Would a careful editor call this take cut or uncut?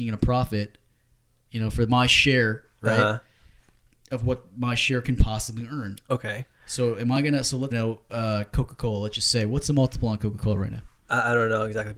cut